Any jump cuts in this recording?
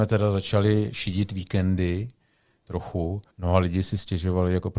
yes; 1 cut; at 3.3 s

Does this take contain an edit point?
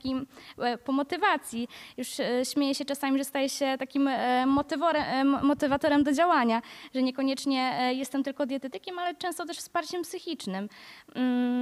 no; 0 cuts

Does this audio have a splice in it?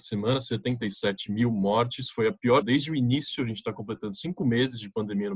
yes; 1 cut; at 2.6 s

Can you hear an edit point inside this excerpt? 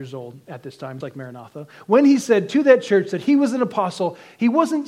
yes; 1 cut; at 1.0 s

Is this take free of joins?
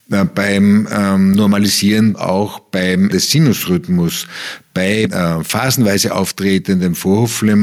no; 3 cuts; at 2.1 s, 3.1 s, 5.1 s

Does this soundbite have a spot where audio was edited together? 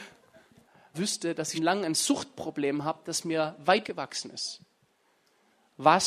yes; 3 cuts; at 0.9 s, 1.5 s, 3.8 s

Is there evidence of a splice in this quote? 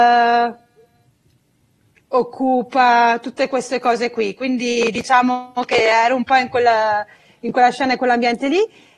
no; 0 cuts

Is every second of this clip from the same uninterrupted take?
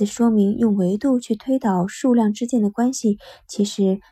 yes; 0 cuts

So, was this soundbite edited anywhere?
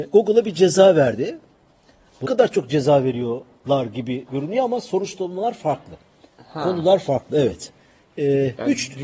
yes; 1 cut; at 2.2 s

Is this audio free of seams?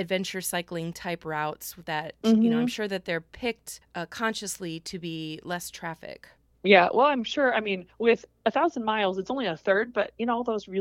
no; 3 cuts; at 3.8 s, 6.4 s, 7.9 s

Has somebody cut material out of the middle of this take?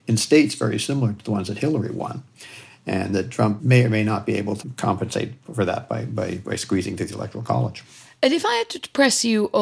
no; 0 cuts

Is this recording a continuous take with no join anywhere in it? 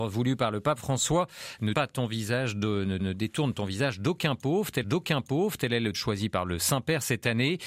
no; 4 cuts; at 1.7 s, 3.0 s, 4.8 s, 5.9 s

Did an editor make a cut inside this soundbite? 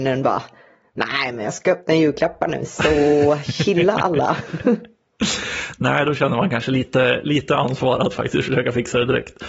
no; 0 cuts

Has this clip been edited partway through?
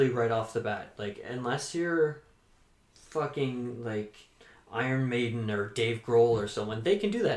no; 0 cuts

